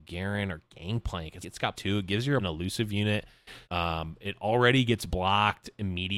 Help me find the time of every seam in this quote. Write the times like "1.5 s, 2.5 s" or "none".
1.4 s, 1.7 s, 2.4 s, 3.6 s